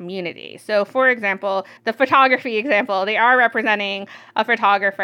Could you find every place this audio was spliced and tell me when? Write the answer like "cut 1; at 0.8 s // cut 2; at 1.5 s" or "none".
cut 1; at 1.8 s